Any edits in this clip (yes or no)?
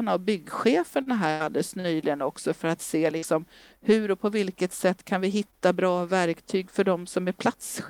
no